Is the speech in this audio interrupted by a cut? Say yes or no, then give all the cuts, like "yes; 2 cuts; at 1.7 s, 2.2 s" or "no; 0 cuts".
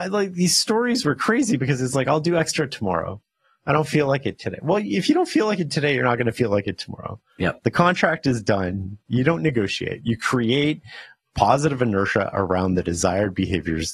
no; 0 cuts